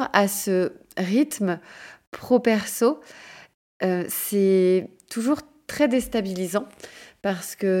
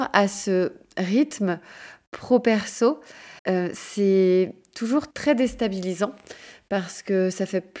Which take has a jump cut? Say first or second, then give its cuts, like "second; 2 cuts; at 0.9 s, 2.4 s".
second; 2 cuts; at 3.4 s, 5.1 s